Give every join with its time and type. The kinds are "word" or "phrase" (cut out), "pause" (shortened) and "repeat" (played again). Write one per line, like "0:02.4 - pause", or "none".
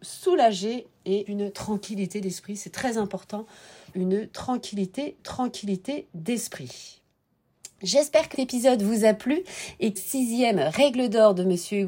0:01.3 - word
0:03.9 - word
0:05.2 - repeat
0:08.3 - word
0:10.0 - phrase